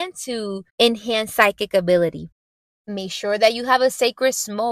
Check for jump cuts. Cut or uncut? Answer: uncut